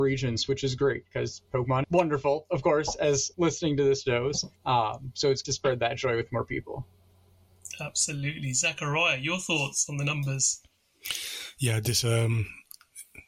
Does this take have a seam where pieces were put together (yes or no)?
yes